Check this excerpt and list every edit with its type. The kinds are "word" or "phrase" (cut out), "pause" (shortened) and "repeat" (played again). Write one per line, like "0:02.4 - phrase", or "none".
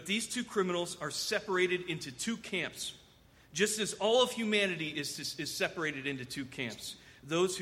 none